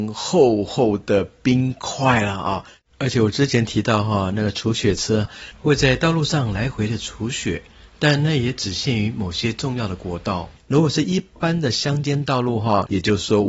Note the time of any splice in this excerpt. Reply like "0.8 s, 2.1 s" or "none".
none